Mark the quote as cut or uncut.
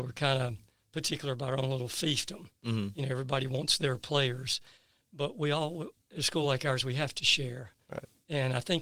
uncut